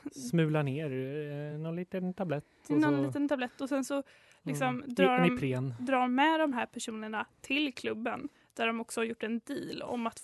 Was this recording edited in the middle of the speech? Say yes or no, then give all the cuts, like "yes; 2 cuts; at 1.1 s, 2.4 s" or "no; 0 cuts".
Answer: no; 0 cuts